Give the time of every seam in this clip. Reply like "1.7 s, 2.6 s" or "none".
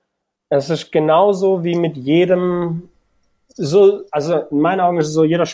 none